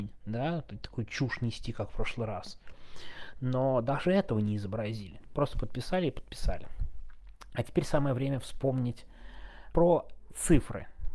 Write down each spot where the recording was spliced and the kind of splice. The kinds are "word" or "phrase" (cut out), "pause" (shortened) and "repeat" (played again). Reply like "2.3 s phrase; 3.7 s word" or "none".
9.7 s word